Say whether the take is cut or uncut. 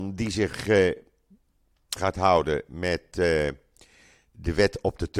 cut